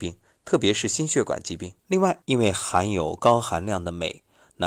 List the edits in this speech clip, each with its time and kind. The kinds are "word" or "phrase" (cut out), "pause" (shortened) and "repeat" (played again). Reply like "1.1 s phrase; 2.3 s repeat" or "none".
1.8 s pause; 2.2 s pause